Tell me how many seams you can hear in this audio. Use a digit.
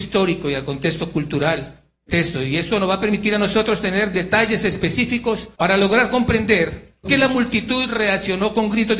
3